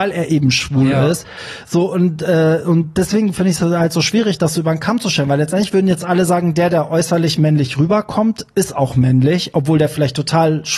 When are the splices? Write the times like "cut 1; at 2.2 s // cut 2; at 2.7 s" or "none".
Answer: none